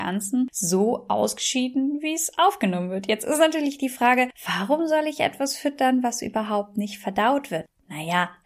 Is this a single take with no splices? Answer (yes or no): yes